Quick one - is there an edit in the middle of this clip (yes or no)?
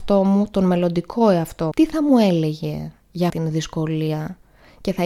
yes